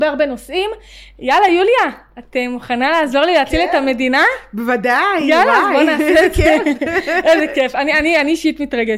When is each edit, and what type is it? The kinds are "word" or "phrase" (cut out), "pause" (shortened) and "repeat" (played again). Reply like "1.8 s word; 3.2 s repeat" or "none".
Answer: none